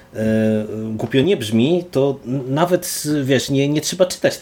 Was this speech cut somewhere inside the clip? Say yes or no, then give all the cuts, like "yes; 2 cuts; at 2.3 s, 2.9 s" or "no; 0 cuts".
no; 0 cuts